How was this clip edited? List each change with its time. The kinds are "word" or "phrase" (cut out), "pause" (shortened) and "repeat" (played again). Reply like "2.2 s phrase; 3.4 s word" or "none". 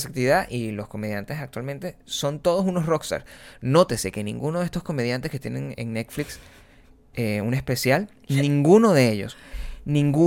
5.7 s word